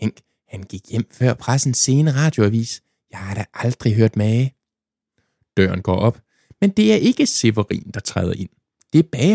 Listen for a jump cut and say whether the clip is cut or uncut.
uncut